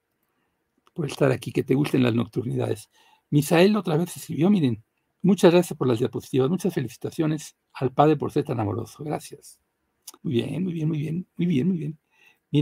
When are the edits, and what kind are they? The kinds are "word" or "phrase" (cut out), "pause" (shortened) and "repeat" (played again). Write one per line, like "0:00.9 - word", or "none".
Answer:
0:05.1 - pause
0:07.6 - pause
0:10.2 - pause